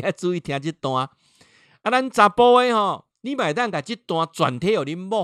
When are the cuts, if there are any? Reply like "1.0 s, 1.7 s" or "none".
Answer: 3.1 s